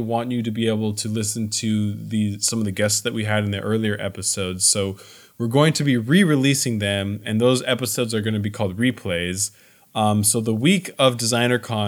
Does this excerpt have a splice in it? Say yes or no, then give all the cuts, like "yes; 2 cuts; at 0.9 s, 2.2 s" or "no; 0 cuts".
no; 0 cuts